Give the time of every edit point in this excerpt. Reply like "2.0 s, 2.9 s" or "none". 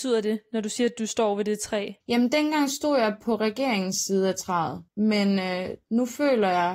2.0 s, 4.9 s